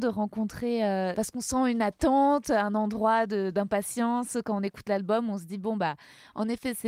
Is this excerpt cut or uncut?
uncut